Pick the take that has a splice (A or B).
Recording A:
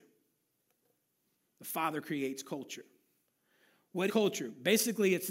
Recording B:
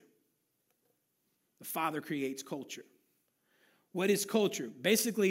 A